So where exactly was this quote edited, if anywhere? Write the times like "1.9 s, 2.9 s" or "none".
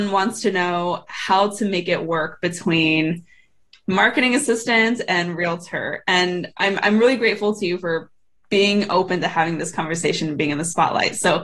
none